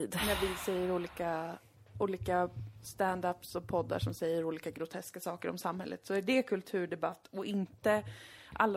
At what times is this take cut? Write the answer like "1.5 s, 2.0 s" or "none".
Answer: none